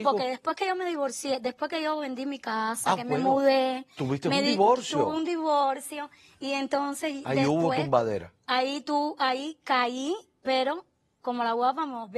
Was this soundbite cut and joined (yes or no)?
no